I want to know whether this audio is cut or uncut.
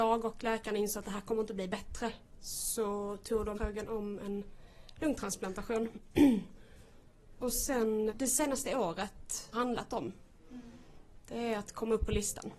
cut